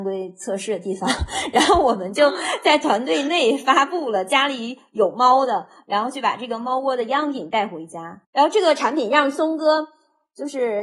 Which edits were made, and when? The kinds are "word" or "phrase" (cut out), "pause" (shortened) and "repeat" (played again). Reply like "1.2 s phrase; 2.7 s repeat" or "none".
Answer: 8.2 s pause